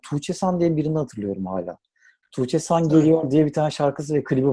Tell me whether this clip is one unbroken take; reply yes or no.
yes